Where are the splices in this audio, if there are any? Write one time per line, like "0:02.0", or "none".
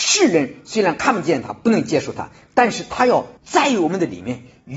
0:03.4